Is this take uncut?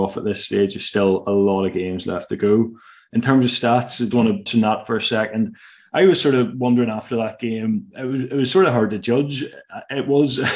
no; 2 cuts; at 4.1 s, 4.5 s

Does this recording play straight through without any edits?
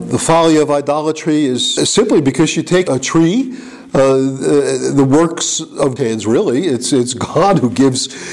no; 3 cuts; at 1.8 s, 2.9 s, 6.0 s

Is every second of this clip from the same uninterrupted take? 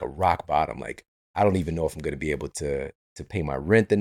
yes; 0 cuts

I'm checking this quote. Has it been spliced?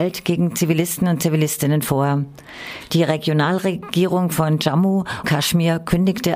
yes; 1 cut; at 5.2 s

